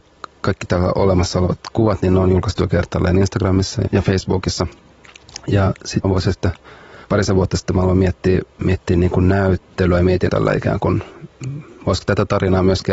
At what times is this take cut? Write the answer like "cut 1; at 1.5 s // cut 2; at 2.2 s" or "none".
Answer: cut 1; at 3.9 s // cut 2; at 6.0 s // cut 3; at 7.0 s // cut 4; at 8.5 s // cut 5; at 10.3 s